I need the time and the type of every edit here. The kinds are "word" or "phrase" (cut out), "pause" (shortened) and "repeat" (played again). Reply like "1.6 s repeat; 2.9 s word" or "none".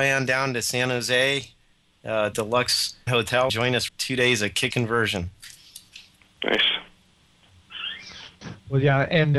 2.3 s word; 3.1 s word; 3.5 s word; 3.9 s word; 4.7 s word